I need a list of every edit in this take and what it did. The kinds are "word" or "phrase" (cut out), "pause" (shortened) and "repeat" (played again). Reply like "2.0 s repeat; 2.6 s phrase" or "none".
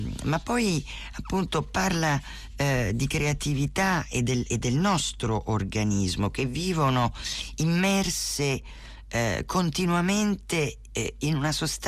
4.5 s word